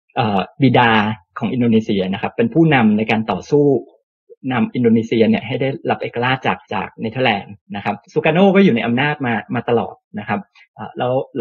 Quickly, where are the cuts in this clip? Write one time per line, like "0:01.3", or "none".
0:06.6
0:08.0